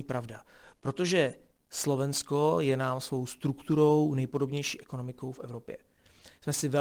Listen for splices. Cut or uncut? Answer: uncut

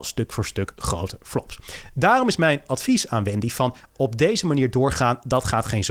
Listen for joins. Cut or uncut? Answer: uncut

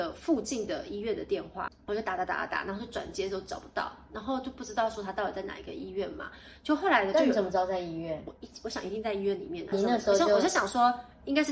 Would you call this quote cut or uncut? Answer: cut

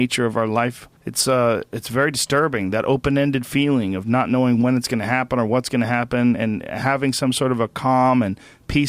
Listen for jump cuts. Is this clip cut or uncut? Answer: cut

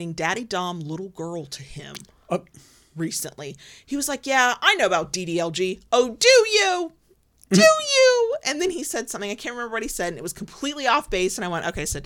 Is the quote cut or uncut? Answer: uncut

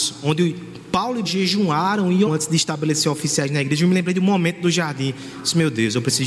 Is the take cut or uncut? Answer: cut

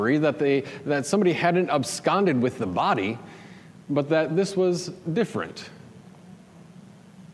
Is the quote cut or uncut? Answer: uncut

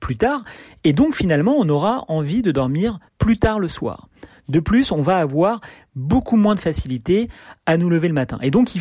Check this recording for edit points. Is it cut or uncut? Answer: cut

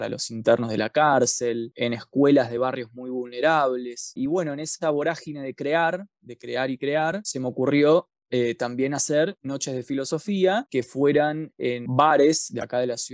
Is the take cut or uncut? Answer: uncut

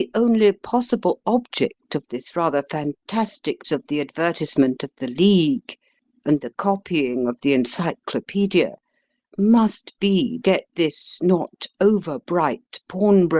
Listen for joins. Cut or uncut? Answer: cut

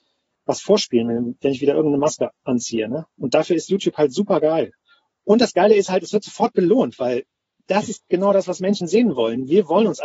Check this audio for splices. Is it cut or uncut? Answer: uncut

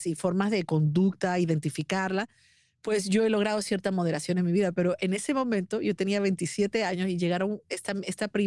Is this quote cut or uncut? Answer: uncut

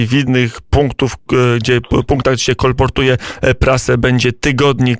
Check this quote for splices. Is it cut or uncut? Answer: uncut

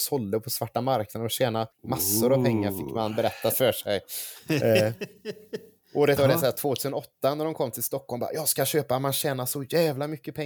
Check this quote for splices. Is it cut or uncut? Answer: cut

